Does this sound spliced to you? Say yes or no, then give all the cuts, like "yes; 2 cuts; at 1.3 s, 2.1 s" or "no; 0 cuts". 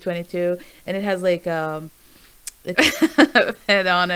yes; 1 cut; at 2.7 s